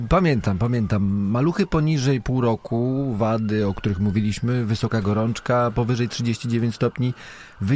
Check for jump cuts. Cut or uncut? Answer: uncut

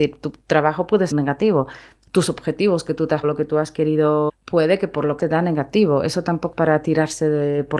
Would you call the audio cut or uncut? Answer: cut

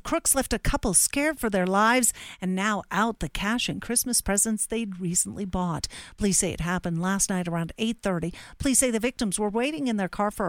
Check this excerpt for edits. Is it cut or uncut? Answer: uncut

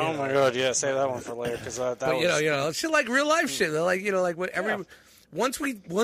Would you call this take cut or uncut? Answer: uncut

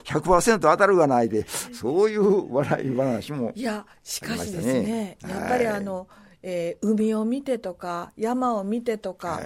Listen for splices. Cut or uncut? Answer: uncut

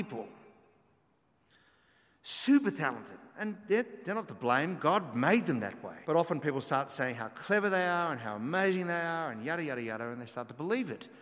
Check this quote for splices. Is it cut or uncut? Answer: cut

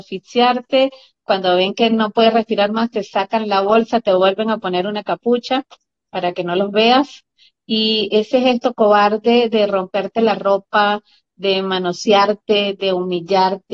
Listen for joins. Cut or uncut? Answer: uncut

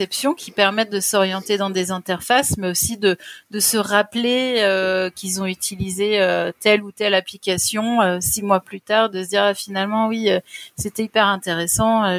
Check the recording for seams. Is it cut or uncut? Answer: uncut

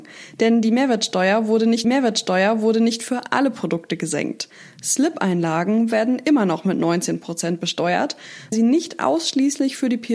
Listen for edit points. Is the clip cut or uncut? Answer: cut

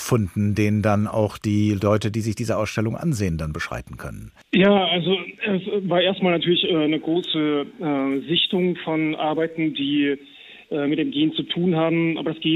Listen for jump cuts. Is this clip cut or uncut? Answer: cut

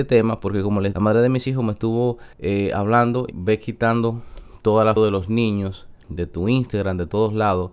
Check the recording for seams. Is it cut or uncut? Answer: cut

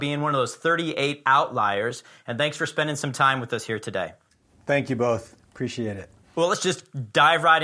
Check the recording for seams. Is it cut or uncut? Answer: uncut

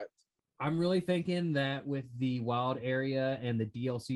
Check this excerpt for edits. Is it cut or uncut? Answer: uncut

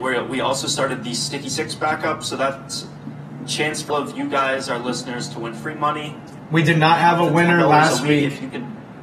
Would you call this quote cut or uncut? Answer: cut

